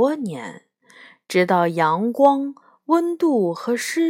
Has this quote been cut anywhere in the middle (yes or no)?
no